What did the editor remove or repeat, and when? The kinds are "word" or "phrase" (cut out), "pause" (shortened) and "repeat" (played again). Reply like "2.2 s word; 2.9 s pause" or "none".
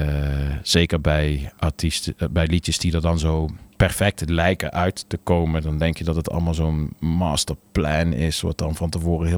3.7 s pause